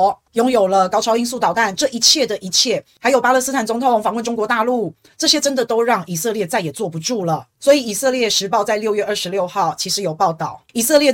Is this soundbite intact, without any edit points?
yes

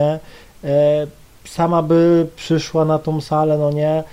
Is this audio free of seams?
yes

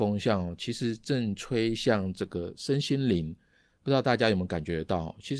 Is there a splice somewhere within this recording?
no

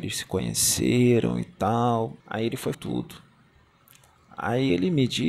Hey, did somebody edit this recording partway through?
yes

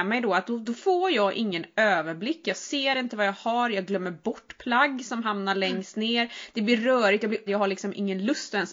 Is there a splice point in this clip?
yes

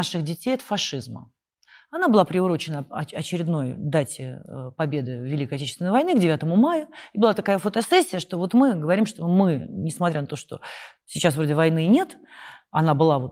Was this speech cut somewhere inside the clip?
no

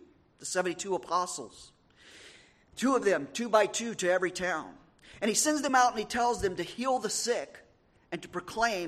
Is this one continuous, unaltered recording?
yes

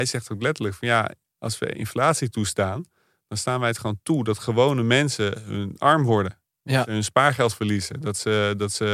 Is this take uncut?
yes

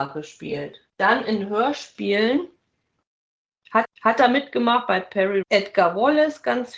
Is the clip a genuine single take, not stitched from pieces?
no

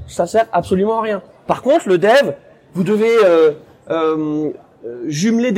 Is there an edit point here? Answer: no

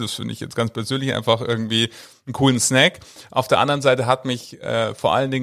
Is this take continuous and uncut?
yes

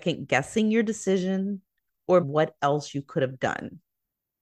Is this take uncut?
no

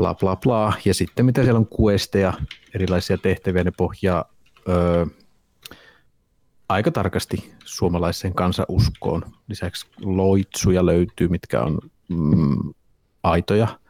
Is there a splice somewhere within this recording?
no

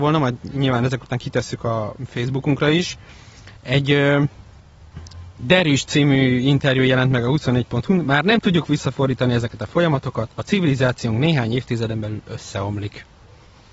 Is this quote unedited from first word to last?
no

